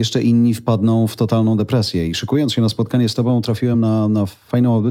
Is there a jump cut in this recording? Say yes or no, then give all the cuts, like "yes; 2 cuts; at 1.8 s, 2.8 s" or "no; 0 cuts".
no; 0 cuts